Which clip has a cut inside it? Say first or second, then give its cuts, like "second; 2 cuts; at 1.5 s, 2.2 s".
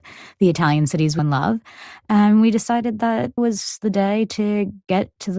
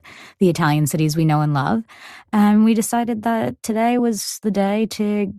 first; 2 cuts; at 1.2 s, 3.4 s